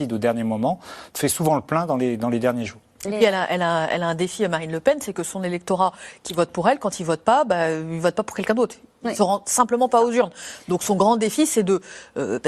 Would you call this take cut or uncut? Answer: uncut